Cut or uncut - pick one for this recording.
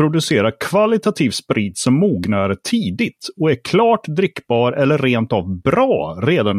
uncut